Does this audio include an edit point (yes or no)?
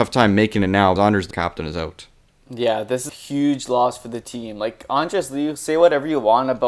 yes